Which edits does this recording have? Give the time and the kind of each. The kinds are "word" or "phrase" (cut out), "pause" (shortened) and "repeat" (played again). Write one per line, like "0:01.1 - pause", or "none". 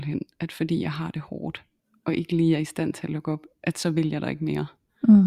none